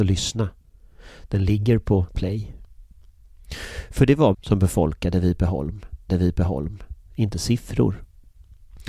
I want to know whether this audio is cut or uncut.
cut